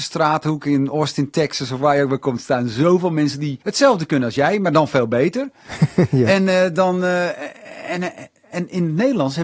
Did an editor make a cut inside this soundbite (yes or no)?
yes